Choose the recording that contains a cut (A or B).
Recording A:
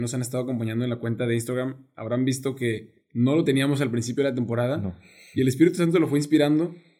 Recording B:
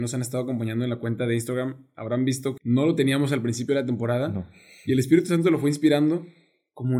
B